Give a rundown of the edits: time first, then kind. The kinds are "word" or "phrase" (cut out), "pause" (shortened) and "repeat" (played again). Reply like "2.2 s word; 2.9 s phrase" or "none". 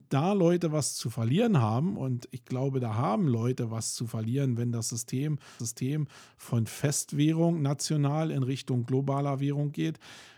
5.6 s repeat